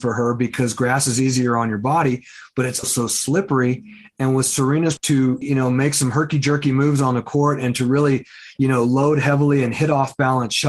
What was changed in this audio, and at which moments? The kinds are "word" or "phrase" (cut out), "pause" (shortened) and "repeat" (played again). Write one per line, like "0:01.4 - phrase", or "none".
0:02.8 - word
0:05.0 - word
0:05.4 - word